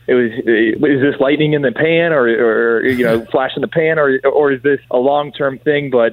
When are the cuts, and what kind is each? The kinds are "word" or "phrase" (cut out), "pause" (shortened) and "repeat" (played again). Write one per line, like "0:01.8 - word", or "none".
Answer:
0:04.8 - pause